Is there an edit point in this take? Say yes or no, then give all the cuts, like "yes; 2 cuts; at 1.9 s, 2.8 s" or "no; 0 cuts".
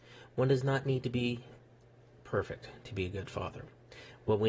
no; 0 cuts